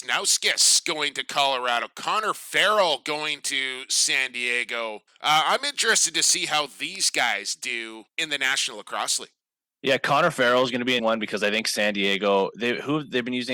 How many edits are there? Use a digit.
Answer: 3